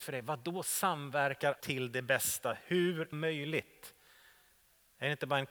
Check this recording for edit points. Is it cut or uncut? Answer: cut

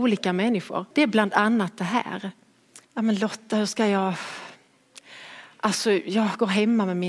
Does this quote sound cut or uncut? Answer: cut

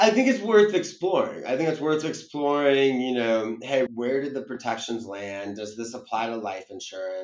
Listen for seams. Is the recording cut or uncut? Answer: cut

